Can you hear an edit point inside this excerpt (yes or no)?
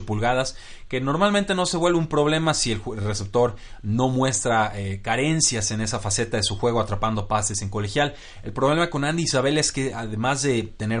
no